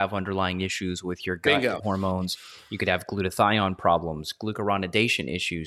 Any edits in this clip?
yes; 1 cut; at 1.8 s

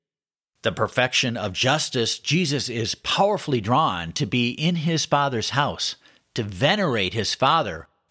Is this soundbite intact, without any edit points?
yes; 0 cuts

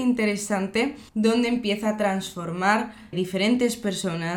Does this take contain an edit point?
yes; 2 cuts; at 1.1 s, 3.1 s

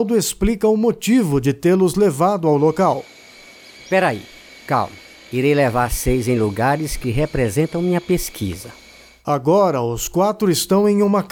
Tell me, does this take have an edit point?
no; 0 cuts

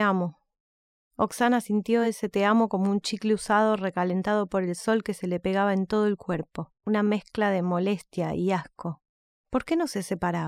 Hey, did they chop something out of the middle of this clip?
no; 0 cuts

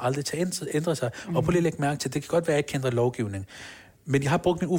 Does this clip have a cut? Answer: no; 0 cuts

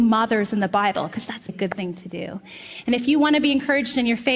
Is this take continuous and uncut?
no; 1 cut; at 1.5 s

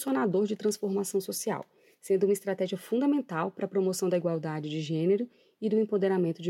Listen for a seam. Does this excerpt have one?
no; 0 cuts

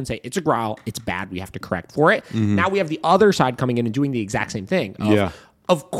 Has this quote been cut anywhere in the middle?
no; 0 cuts

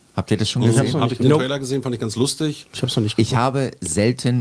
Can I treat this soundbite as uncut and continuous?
yes; 0 cuts

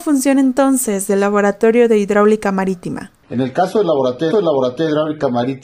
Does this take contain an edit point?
yes; 1 cut; at 4.3 s

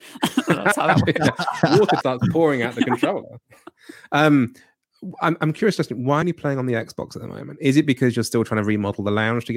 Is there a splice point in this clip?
yes; 2 cuts; at 2.0 s, 6.2 s

